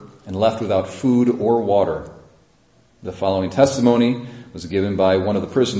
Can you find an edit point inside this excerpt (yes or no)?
no